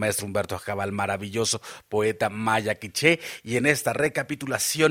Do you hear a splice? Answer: no; 0 cuts

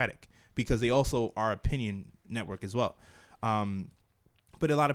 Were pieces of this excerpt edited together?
no; 0 cuts

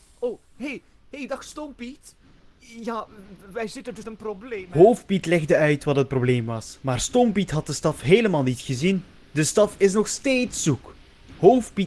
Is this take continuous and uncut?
no; 1 cut; at 4.0 s

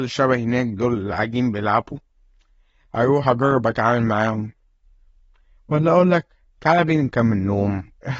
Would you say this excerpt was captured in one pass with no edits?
yes; 0 cuts

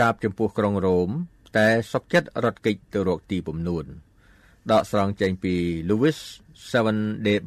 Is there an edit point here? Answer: no; 0 cuts

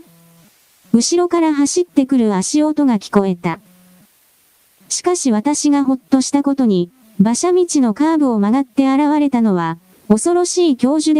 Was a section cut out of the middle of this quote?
no; 0 cuts

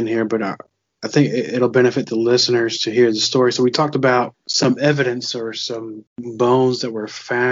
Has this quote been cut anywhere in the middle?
no; 0 cuts

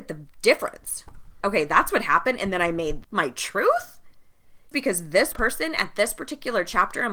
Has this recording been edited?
yes; 4 cuts; at 1.4 s, 3.0 s, 4.7 s, 5.3 s

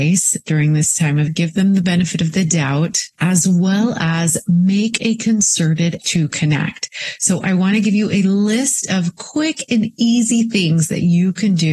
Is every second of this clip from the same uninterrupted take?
no; 3 cuts; at 1.3 s, 3.1 s, 6.0 s

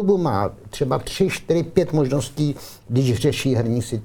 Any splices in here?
no; 0 cuts

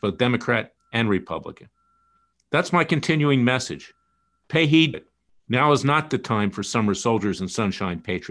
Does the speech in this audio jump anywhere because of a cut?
yes; 1 cut; at 4.9 s

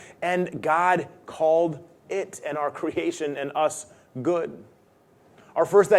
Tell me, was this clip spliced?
no; 0 cuts

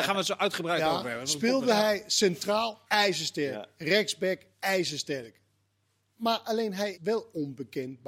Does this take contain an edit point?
yes; 3 cuts; at 2.9 s, 4.5 s, 6.9 s

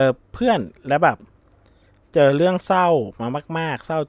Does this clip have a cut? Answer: no; 0 cuts

